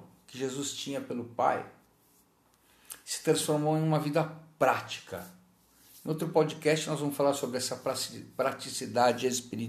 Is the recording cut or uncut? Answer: uncut